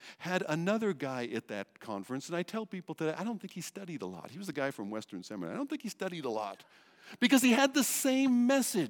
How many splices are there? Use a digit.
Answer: 0